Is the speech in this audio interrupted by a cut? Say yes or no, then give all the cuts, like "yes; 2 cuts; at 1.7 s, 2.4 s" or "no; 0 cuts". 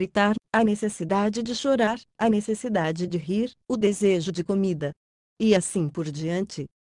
no; 0 cuts